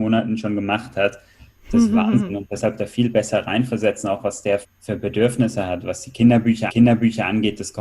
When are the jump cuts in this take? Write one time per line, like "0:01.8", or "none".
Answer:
0:02.8
0:04.6
0:06.7